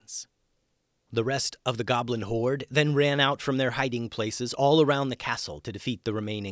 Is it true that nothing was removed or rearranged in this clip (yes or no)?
yes